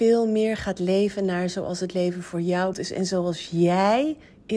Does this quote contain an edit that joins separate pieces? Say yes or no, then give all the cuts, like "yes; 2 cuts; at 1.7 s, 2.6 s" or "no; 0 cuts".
yes; 1 cut; at 2.7 s